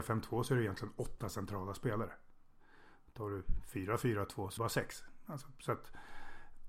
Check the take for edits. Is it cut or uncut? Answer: cut